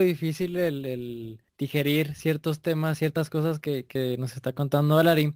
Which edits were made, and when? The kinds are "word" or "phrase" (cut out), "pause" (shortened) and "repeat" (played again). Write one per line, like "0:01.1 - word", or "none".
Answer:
0:01.5 - pause